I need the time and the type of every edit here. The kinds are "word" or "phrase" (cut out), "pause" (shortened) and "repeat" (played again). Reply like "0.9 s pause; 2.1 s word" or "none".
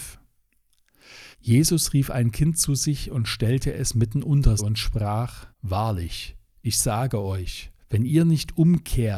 1.3 s pause; 4.6 s word; 5.5 s pause; 7.8 s pause